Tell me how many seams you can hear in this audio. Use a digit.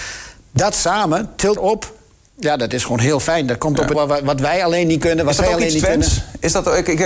2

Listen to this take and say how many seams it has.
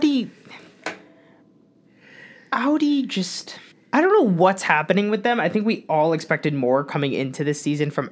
1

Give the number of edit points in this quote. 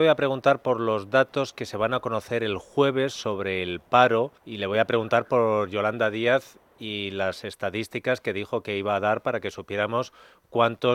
1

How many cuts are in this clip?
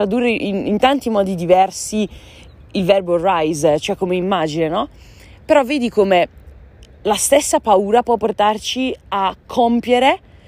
0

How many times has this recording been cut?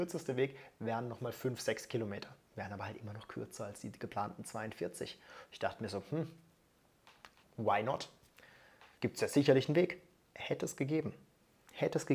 4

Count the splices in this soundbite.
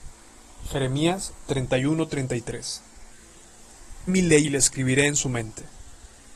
2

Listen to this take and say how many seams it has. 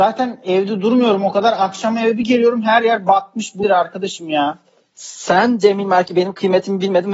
1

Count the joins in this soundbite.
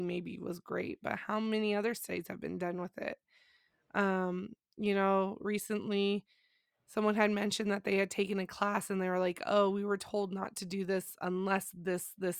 0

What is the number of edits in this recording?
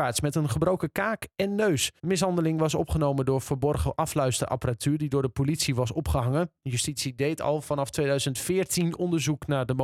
1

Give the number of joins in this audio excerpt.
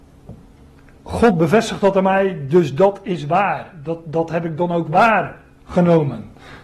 0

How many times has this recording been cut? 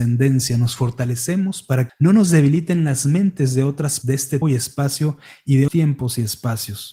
4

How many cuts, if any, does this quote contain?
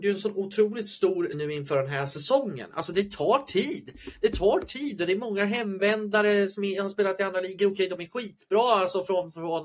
1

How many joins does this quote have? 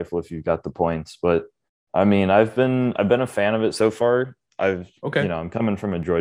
1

